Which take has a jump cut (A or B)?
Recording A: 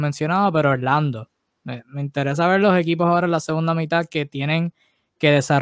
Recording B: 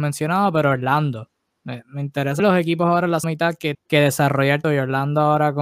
B